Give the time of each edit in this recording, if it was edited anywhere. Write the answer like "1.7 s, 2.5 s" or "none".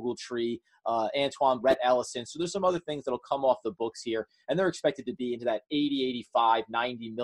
1.6 s